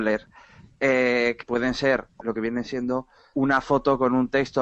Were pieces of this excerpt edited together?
yes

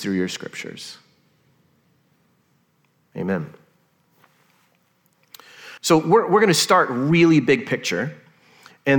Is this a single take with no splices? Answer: no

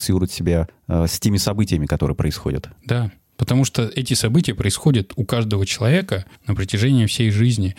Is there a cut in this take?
yes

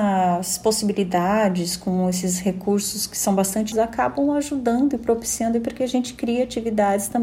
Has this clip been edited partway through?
yes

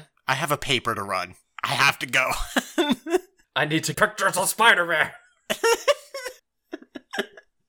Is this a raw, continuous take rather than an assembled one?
no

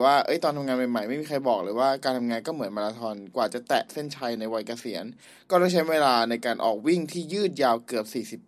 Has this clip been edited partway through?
no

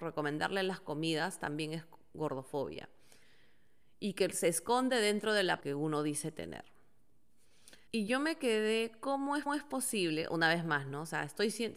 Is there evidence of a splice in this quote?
yes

